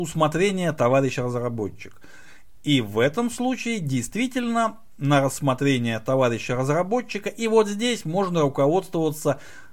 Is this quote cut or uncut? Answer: uncut